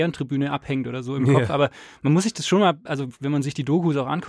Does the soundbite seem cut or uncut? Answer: uncut